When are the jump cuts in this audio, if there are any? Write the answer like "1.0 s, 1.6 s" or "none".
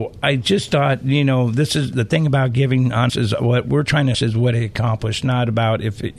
3.1 s, 4.1 s